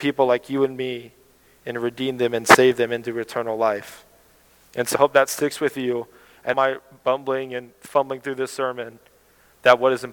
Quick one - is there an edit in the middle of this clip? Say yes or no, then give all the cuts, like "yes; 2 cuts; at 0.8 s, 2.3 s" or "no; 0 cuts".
yes; 2 cuts; at 5.0 s, 6.5 s